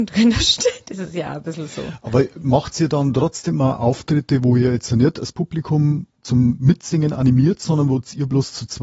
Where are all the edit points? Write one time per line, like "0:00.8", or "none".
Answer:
none